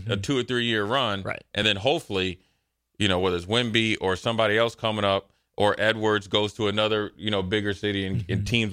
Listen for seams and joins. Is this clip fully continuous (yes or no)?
yes